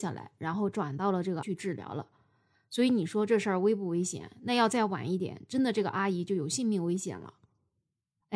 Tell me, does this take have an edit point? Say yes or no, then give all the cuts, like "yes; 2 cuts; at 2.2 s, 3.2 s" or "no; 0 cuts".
yes; 1 cut; at 1.4 s